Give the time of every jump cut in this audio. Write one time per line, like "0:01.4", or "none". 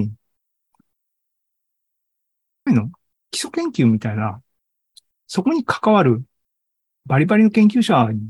0:02.7